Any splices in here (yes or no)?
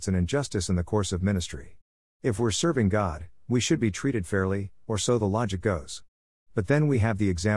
no